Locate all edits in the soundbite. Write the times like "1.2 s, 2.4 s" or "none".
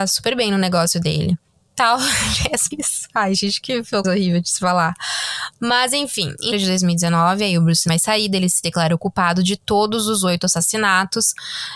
1.5 s, 2.7 s, 4.0 s, 6.5 s, 7.9 s